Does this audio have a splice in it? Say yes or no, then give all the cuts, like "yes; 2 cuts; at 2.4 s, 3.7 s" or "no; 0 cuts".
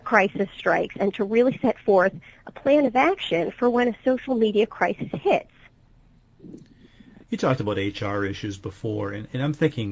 no; 0 cuts